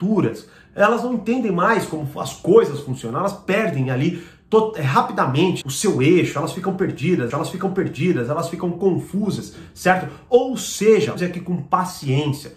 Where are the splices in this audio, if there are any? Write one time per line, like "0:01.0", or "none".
0:05.6
0:07.3
0:11.1